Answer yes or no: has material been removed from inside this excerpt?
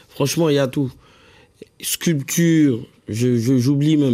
no